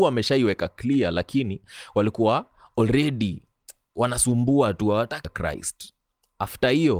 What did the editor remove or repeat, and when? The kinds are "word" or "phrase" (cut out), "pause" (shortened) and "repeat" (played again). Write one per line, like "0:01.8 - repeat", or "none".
0:05.2 - word